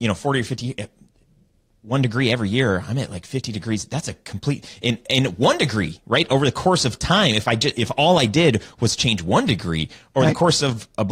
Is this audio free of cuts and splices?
yes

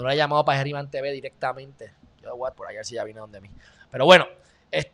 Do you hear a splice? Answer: yes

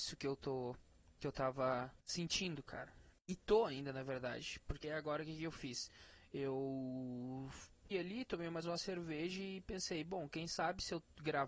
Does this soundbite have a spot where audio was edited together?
yes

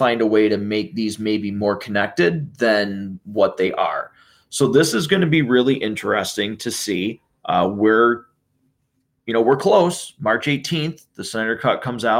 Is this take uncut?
yes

